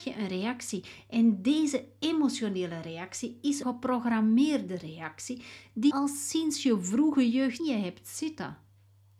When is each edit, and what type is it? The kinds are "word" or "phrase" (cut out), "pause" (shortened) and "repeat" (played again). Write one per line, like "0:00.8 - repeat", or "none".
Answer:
0:03.6 - word
0:05.9 - word
0:07.6 - word